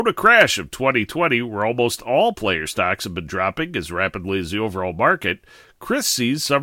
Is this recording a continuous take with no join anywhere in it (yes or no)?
yes